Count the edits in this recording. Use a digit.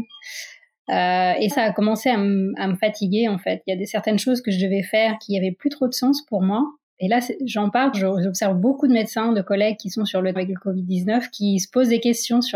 3